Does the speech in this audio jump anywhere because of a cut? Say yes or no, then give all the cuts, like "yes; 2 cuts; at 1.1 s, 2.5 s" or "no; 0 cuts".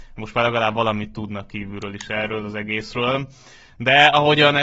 no; 0 cuts